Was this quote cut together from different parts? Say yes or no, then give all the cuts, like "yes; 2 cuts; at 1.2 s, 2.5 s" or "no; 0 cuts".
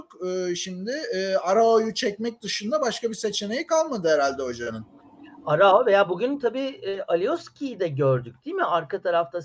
no; 0 cuts